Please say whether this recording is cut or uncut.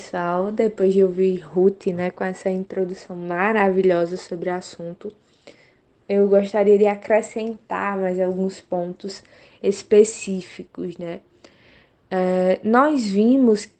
uncut